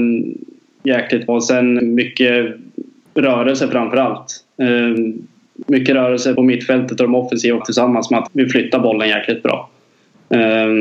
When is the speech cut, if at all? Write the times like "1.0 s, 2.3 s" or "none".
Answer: 1.3 s, 1.8 s, 6.4 s, 7.6 s, 8.3 s